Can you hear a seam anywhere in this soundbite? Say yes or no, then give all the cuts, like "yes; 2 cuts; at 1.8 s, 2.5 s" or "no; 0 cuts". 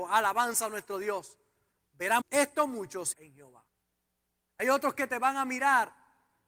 yes; 2 cuts; at 2.2 s, 3.1 s